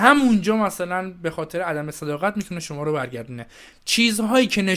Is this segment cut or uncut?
uncut